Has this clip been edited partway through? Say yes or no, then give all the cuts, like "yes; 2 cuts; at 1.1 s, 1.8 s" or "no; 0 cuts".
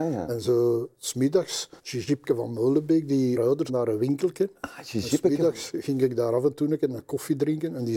yes; 3 cuts; at 1.8 s, 3.4 s, 3.7 s